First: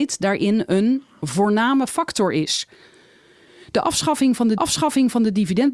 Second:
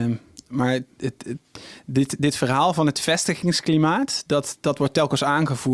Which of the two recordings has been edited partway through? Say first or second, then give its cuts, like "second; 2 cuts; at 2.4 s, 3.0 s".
first; 1 cut; at 4.6 s